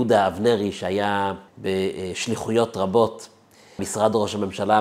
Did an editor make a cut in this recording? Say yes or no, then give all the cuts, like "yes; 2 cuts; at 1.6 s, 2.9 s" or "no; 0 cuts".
yes; 2 cuts; at 1.5 s, 3.8 s